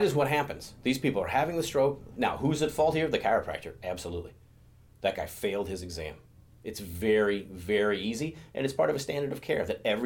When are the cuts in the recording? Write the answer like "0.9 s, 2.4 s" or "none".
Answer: none